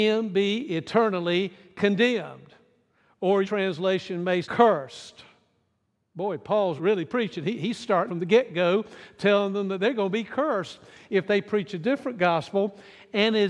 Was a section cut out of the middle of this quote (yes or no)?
yes